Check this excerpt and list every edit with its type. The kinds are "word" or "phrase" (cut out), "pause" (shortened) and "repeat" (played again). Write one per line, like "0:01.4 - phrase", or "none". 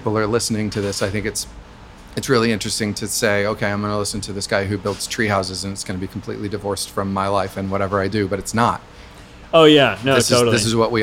none